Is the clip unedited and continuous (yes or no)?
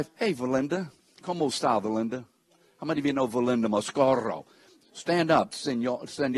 yes